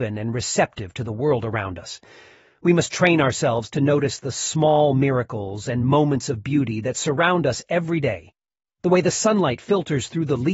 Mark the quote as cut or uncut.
uncut